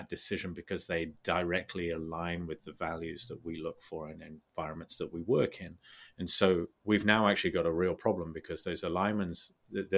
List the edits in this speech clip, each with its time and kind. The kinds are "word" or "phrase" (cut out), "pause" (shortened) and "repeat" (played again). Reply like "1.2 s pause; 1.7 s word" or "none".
none